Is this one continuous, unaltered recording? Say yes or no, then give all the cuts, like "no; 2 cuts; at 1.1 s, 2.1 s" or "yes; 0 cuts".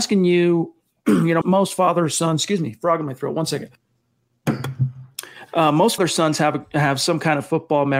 no; 2 cuts; at 1.4 s, 6.0 s